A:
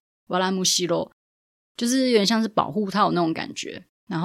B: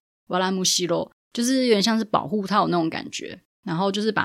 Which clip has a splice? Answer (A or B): B